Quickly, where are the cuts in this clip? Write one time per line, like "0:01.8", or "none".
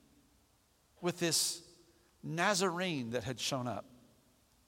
none